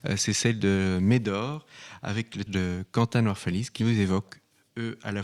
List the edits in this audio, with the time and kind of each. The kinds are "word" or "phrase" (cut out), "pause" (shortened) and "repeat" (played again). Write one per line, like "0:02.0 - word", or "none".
0:02.5 - word
0:03.8 - word